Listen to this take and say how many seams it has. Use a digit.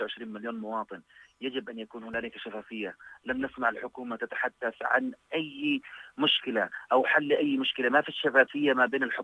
0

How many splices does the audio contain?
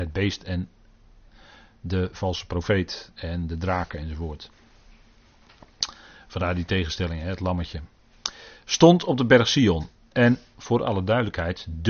1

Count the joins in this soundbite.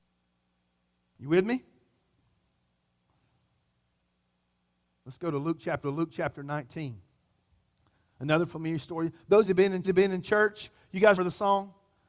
4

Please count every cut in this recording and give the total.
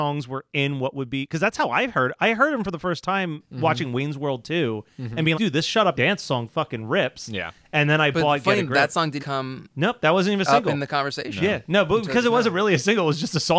3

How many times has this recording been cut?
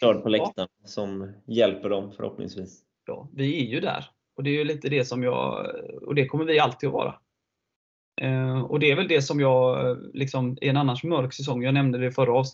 1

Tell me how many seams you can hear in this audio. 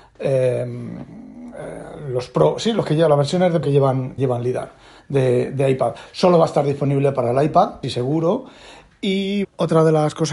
4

